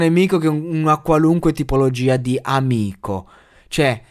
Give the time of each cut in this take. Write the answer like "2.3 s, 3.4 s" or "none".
none